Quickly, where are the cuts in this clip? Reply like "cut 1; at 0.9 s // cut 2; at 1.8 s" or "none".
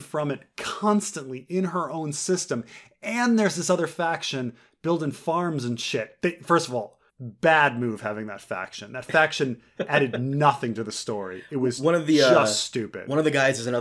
cut 1; at 7.1 s